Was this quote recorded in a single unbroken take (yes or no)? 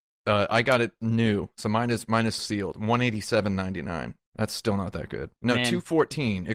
no